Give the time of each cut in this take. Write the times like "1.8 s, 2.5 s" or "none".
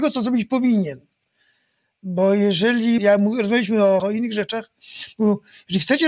3.0 s, 4.0 s